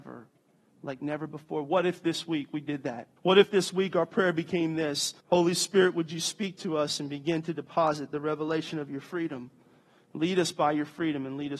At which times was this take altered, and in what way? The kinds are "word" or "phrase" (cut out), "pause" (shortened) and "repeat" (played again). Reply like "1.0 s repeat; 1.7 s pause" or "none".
3.2 s pause; 5.2 s pause